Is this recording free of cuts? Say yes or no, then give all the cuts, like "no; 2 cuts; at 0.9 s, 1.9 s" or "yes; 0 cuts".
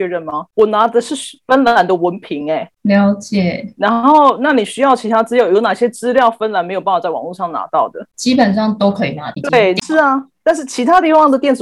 yes; 0 cuts